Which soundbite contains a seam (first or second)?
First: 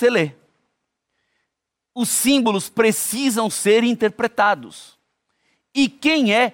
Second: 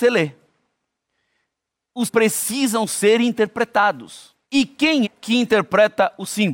second